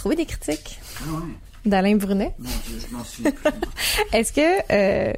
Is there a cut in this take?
no; 0 cuts

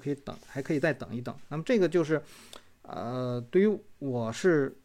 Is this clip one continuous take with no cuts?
yes; 0 cuts

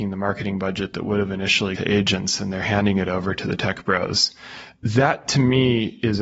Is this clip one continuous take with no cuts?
no; 1 cut; at 1.8 s

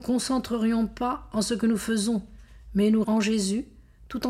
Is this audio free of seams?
no; 1 cut; at 3.0 s

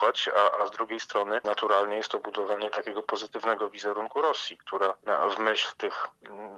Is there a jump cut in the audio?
no; 0 cuts

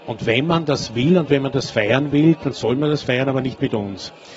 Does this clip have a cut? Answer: no; 0 cuts

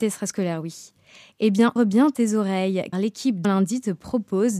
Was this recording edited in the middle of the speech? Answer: yes; 3 cuts; at 1.8 s, 2.9 s, 3.4 s

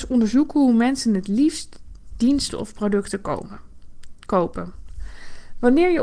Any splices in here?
no; 0 cuts

